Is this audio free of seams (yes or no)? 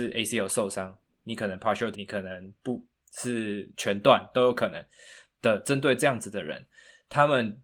no